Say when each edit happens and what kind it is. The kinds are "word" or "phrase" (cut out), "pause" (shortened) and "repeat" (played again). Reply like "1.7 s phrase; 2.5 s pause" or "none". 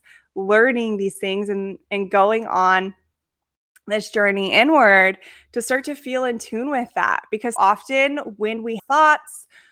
7.6 s word; 8.8 s word